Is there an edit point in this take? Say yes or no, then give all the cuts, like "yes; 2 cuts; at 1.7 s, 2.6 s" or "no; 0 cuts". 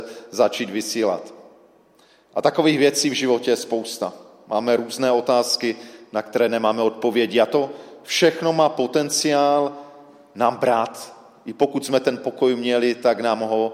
no; 0 cuts